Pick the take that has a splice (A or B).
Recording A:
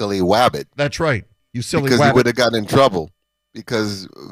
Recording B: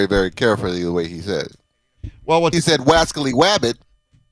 B